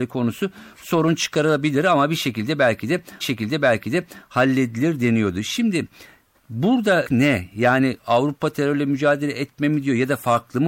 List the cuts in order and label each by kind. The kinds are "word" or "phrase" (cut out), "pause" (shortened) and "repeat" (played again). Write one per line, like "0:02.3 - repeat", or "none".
0:03.2 - repeat
0:07.0 - phrase